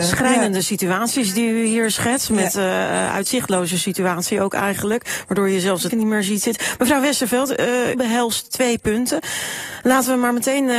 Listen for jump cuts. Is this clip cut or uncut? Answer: cut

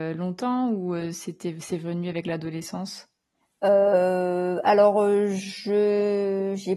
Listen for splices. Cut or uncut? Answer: uncut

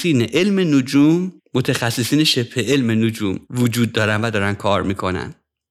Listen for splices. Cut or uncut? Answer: cut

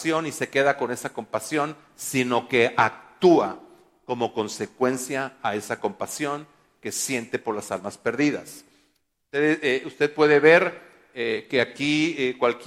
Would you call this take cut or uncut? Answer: uncut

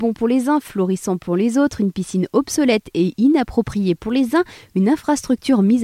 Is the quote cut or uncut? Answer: uncut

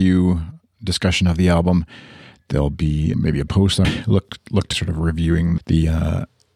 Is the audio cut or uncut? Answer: cut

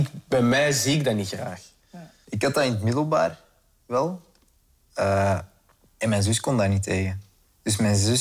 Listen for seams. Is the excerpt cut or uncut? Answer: uncut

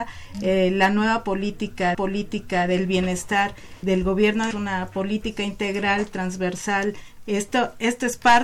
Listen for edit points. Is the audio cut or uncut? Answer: cut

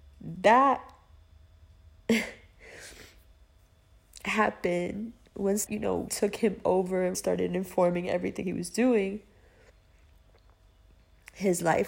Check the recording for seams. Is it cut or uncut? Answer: cut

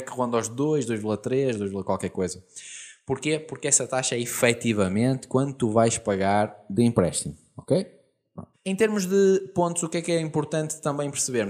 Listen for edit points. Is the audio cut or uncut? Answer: cut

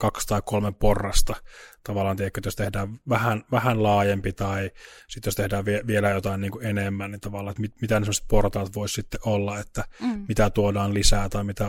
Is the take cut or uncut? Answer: uncut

